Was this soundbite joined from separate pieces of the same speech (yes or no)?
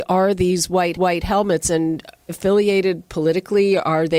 yes